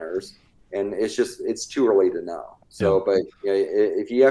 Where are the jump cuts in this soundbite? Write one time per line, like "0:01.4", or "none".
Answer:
0:02.6